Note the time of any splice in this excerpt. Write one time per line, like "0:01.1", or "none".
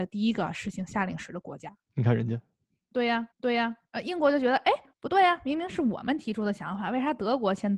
0:01.9
0:03.3
0:04.9